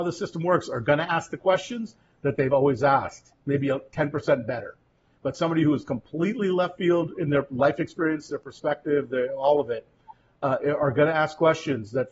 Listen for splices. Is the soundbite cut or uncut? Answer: uncut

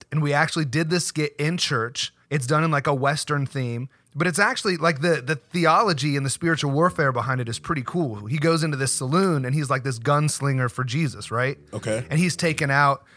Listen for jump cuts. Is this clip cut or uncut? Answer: cut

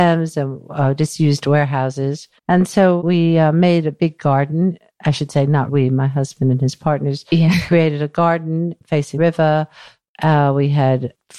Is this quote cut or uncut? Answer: cut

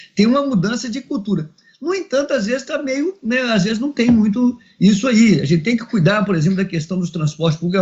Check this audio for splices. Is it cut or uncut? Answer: uncut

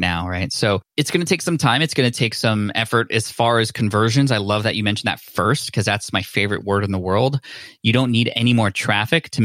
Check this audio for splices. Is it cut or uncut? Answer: uncut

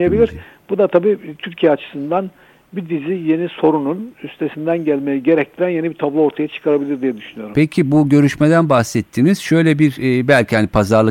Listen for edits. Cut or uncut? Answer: uncut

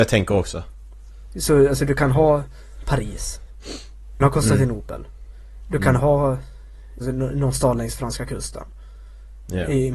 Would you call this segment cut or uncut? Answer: cut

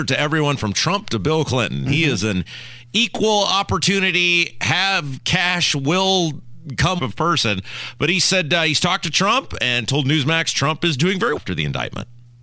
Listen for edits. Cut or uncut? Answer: cut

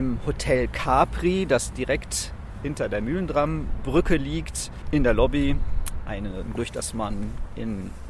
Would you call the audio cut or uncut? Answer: cut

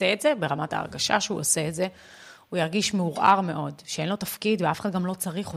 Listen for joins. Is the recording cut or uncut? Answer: uncut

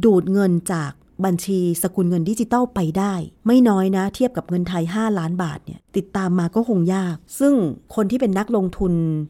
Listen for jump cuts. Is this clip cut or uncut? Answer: cut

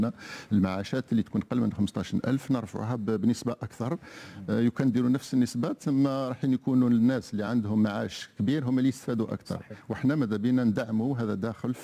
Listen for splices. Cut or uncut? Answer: uncut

